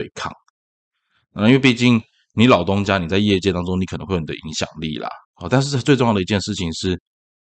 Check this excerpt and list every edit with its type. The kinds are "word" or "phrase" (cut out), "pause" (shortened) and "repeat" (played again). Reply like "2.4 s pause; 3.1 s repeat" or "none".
5.2 s pause